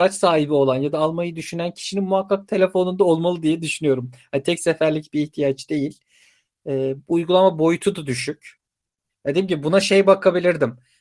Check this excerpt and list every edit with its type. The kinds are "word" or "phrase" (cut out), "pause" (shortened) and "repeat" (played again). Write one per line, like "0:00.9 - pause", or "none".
none